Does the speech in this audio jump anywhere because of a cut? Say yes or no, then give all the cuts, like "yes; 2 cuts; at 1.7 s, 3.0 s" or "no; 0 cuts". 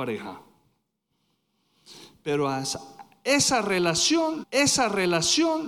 yes; 1 cut; at 4.4 s